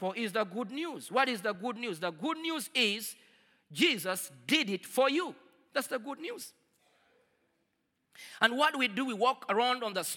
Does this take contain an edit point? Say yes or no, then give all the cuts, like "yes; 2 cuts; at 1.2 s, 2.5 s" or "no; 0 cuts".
no; 0 cuts